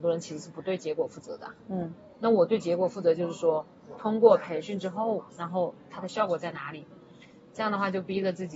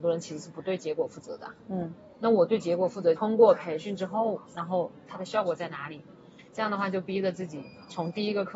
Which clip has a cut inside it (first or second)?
second